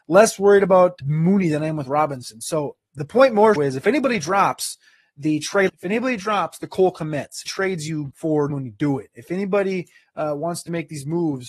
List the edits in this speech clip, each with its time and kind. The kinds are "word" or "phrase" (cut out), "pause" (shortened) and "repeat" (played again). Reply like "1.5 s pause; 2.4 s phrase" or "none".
1.0 s word; 3.6 s word; 5.7 s word; 7.5 s word; 8.1 s word; 8.5 s word